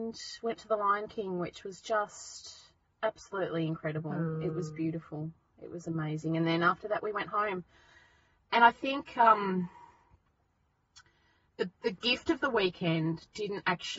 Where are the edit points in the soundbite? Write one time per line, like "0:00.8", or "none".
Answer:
none

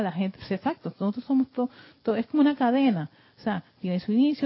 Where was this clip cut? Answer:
none

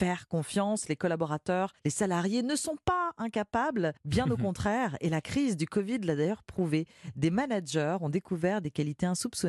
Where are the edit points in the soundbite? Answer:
0:01.8
0:04.0

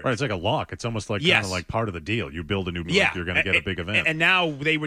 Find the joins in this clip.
0:02.8

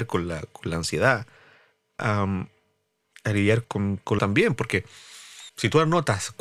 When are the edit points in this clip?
0:02.0
0:03.6
0:04.2

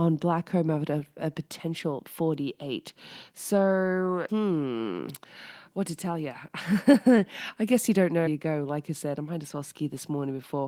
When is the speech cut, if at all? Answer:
0:04.3
0:08.3

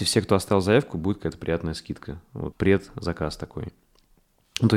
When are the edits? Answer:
0:02.5

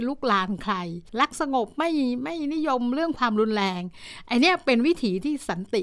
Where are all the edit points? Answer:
0:01.1

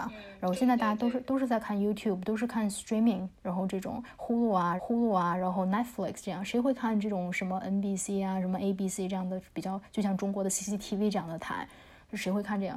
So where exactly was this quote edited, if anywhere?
0:04.8

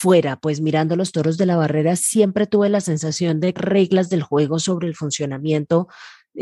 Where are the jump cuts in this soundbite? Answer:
0:02.0
0:03.6

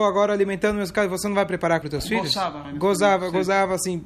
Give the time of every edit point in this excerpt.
0:01.8
0:02.6

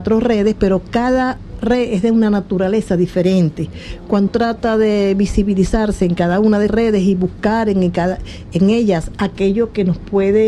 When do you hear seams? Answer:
0:04.3
0:06.7

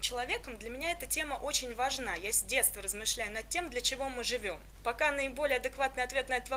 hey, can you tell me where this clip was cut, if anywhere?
none

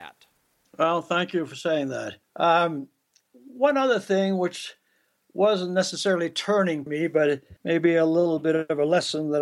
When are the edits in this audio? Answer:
0:02.2
0:06.9
0:07.6

